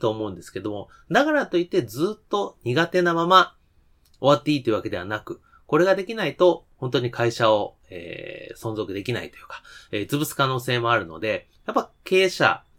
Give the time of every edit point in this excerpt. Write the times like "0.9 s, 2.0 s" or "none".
11.5 s

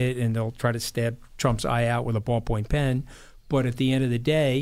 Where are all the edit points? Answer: none

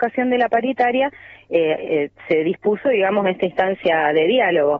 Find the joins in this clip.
none

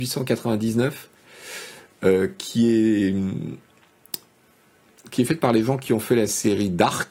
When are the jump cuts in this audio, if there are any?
none

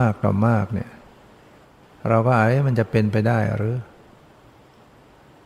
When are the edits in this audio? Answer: 1.6 s

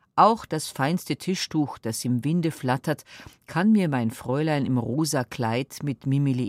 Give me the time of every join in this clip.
none

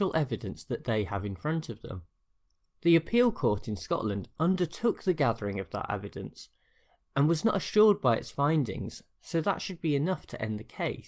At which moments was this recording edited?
none

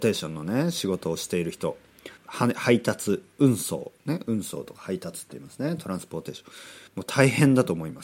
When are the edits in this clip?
2.2 s, 6.9 s

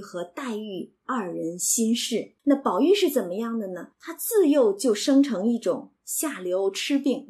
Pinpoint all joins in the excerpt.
2.4 s, 3.9 s

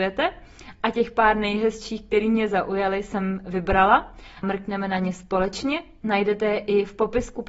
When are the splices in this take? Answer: 4.4 s

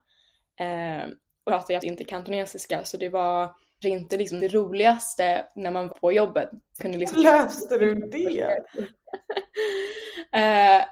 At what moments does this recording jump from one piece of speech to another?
1.5 s, 1.8 s, 3.8 s, 4.4 s, 5.9 s, 6.8 s, 7.1 s

